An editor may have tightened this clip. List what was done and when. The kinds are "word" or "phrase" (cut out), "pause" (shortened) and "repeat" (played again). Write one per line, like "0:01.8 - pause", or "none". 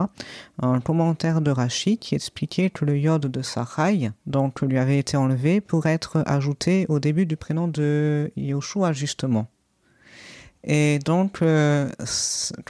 0:04.2 - pause